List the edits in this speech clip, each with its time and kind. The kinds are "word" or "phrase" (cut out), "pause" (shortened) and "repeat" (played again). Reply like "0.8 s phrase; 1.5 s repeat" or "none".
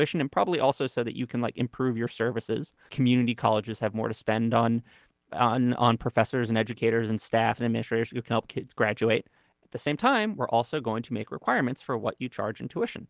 2.9 s word

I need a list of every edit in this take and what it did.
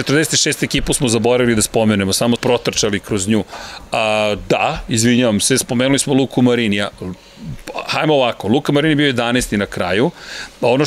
2.4 s word

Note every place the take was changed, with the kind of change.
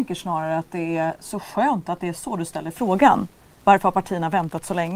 none

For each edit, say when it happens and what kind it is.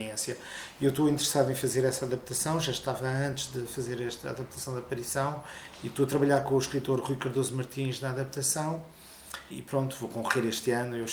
9.5 s word

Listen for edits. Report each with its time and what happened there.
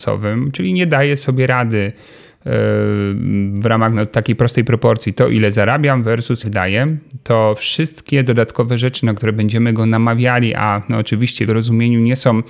6.4 s word; 11.5 s word

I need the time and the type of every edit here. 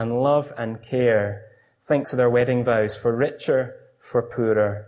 2.0 s word

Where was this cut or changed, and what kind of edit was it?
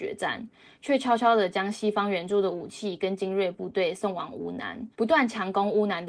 4.9 s pause

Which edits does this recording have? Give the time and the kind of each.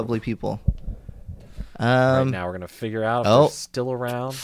none

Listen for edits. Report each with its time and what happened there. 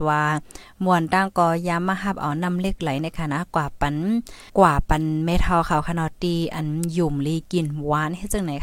4.5 s pause

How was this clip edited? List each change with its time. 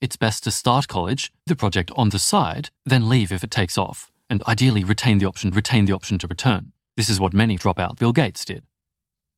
1.5 s word; 2.8 s pause; 5.5 s repeat; 6.8 s pause; 7.6 s word; 8.0 s word

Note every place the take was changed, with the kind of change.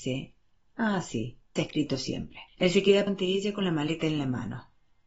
1.6 s phrase; 2.5 s pause; 3.1 s word

